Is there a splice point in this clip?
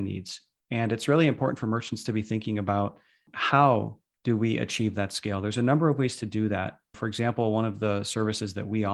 no; 0 cuts

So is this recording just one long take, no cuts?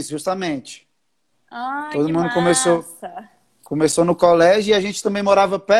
yes; 0 cuts

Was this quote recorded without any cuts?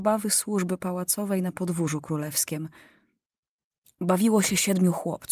yes; 0 cuts

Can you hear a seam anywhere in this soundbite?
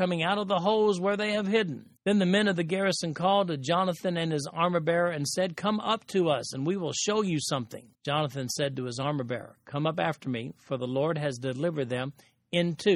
yes; 2 cuts; at 2.0 s, 7.9 s

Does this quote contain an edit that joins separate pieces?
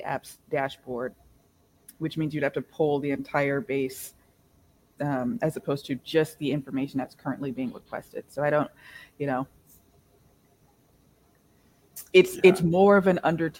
no; 0 cuts

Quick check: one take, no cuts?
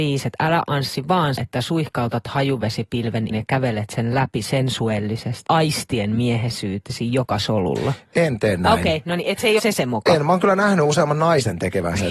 no; 4 cuts; at 1.4 s, 3.3 s, 5.5 s, 9.6 s

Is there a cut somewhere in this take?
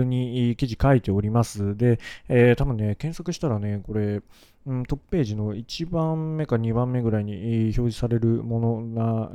no; 0 cuts

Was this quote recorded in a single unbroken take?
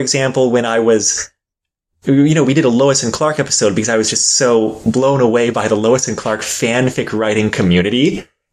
yes; 0 cuts

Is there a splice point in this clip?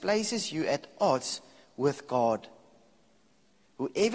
no; 0 cuts

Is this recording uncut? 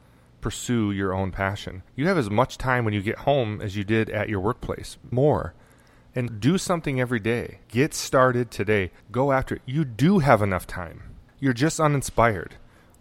no; 6 cuts; at 1.9 s, 5.1 s, 6.3 s, 7.6 s, 9.0 s, 11.3 s

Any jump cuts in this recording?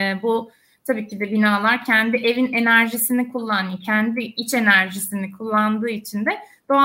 no; 0 cuts

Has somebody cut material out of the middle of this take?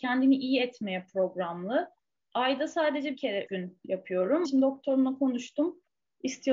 yes; 3 cuts; at 3.1 s, 3.5 s, 4.4 s

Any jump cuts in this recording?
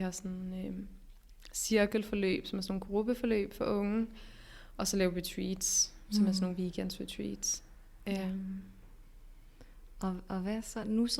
no; 0 cuts

